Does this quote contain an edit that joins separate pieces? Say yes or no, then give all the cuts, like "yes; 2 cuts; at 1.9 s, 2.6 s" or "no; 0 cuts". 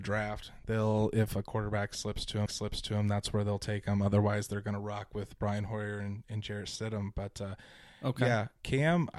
yes; 1 cut; at 2.5 s